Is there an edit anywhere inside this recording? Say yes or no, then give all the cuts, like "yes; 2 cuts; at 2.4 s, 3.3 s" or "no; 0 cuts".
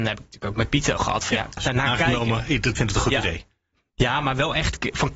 yes; 3 cuts; at 1.0 s, 1.6 s, 2.7 s